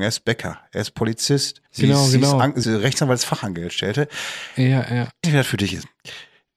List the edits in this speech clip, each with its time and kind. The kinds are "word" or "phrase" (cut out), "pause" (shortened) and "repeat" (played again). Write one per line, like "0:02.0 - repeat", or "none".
0:01.7 - pause
0:02.6 - word
0:05.2 - word